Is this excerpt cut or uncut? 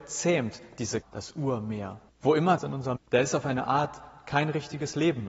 cut